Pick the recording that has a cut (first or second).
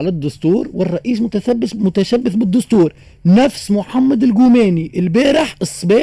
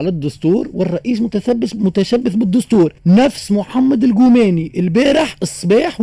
second